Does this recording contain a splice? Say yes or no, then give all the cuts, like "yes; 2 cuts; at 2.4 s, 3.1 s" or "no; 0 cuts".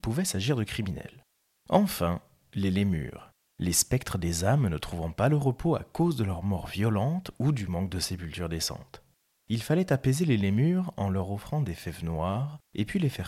no; 0 cuts